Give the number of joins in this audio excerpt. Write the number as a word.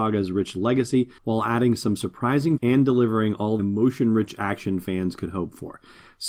three